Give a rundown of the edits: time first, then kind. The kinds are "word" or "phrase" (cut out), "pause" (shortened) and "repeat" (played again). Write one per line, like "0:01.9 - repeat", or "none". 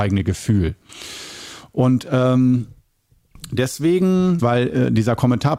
0:04.4 - word